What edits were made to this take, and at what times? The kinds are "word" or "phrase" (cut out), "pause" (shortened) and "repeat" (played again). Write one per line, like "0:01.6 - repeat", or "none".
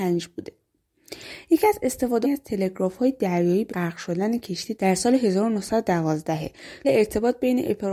0:02.2 - phrase
0:03.7 - word
0:04.8 - word
0:06.8 - phrase